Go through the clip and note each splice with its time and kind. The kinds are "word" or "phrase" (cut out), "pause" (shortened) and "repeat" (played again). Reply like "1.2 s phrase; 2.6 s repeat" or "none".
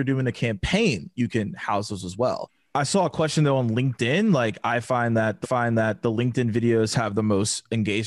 5.4 s repeat